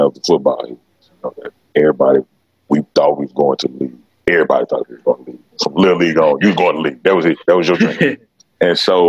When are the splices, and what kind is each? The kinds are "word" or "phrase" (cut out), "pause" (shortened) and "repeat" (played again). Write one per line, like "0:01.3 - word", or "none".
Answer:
none